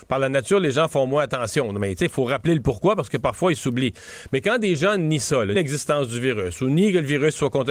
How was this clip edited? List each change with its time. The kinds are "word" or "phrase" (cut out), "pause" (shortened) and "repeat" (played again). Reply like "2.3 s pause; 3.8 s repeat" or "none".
2.1 s word; 5.5 s word